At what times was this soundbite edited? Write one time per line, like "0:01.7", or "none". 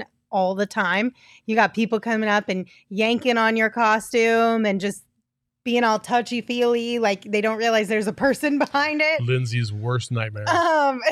none